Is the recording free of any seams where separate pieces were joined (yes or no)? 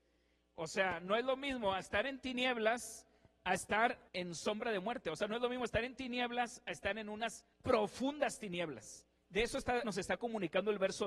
no